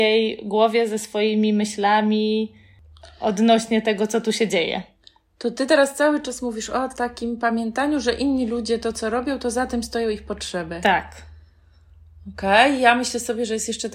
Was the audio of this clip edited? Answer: no; 0 cuts

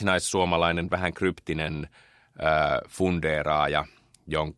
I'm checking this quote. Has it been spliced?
no; 0 cuts

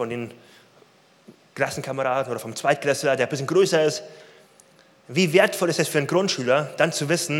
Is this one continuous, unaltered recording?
yes; 0 cuts

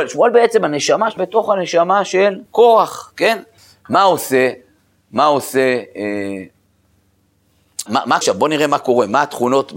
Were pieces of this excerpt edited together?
yes; 6 cuts; at 1.2 s, 2.5 s, 3.6 s, 4.8 s, 7.9 s, 8.2 s

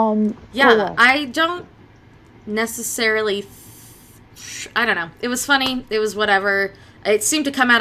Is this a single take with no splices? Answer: yes; 0 cuts

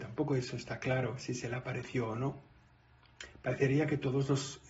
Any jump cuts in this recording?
no; 0 cuts

